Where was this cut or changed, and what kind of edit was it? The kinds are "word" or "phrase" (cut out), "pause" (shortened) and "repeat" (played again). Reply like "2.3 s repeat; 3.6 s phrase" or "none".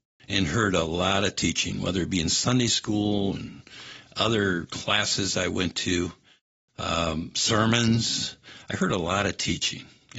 none